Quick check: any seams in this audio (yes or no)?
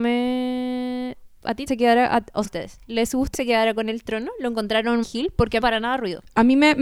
yes